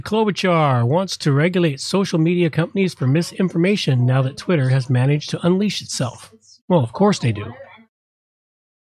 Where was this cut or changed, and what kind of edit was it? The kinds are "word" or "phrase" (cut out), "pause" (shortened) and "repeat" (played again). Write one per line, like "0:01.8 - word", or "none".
none